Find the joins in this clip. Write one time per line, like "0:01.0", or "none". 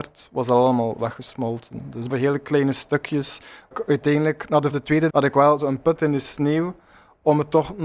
0:02.1
0:03.7
0:04.7
0:05.1
0:06.0